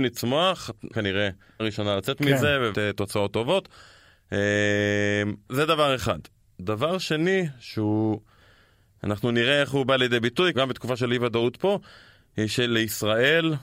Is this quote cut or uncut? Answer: cut